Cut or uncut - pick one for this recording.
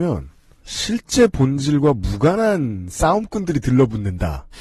uncut